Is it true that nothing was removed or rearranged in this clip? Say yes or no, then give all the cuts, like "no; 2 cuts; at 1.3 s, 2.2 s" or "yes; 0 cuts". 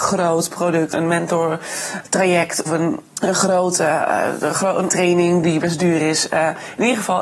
no; 4 cuts; at 0.9 s, 2.7 s, 3.1 s, 4.9 s